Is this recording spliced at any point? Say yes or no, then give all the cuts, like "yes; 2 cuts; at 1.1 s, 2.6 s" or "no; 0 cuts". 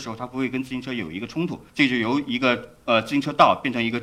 yes; 1 cut; at 1.7 s